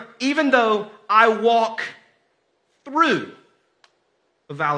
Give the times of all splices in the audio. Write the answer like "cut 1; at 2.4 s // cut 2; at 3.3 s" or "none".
none